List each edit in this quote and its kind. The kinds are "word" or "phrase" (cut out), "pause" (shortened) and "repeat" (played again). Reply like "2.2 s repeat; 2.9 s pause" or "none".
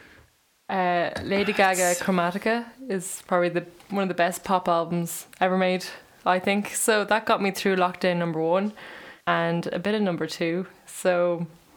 9.2 s pause